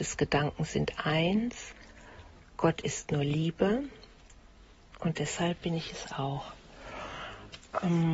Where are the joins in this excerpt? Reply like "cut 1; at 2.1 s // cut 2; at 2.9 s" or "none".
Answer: none